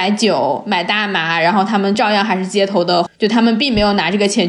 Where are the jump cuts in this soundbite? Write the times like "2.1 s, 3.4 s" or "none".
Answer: 3.1 s